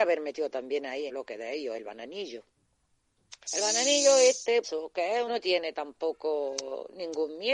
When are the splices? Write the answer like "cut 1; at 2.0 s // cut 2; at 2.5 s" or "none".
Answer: cut 1; at 1.1 s // cut 2; at 3.4 s // cut 3; at 4.6 s // cut 4; at 5.3 s